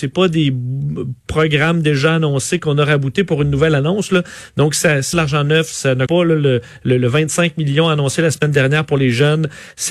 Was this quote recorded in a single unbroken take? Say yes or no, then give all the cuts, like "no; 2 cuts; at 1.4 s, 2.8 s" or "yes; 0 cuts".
no; 2 cuts; at 5.1 s, 6.1 s